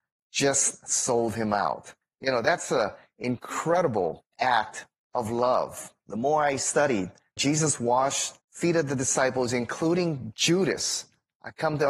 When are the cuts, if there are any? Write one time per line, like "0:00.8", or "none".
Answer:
0:02.0
0:04.3
0:07.4
0:08.4